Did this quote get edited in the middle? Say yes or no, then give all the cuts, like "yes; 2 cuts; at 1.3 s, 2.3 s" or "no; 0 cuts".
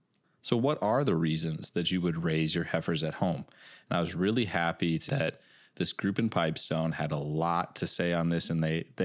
yes; 1 cut; at 5.1 s